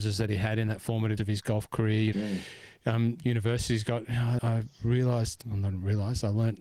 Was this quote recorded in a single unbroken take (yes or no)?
no